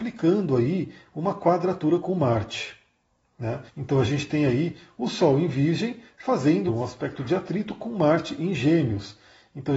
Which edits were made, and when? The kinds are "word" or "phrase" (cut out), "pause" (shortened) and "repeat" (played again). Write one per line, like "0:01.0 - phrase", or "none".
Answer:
0:03.7 - pause
0:06.7 - phrase